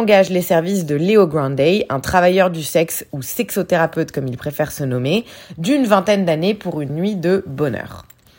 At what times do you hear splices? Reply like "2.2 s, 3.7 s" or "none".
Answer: none